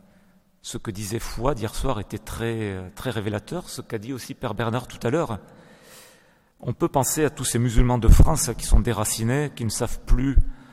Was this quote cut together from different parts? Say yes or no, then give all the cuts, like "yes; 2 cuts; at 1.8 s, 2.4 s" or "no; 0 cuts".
no; 0 cuts